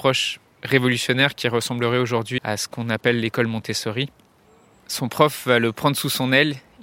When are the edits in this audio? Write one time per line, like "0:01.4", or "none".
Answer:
0:02.4